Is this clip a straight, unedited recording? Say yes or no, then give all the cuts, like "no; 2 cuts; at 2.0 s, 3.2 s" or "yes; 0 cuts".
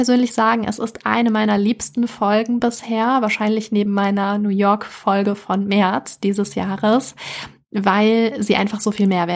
yes; 0 cuts